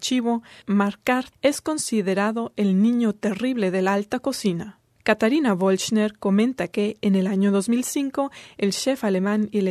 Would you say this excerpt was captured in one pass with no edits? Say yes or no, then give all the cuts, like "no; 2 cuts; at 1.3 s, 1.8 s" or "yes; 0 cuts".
yes; 0 cuts